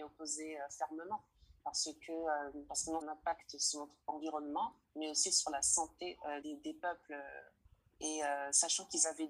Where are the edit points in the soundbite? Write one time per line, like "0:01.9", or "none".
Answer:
0:01.6
0:03.0
0:04.8
0:06.4